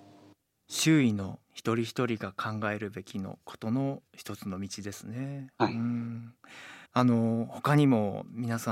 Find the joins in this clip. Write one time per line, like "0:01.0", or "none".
0:01.4
0:04.1
0:05.5
0:06.9